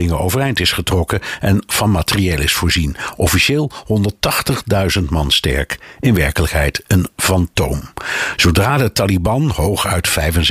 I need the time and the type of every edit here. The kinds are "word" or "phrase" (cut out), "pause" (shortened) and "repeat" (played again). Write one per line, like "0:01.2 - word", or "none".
none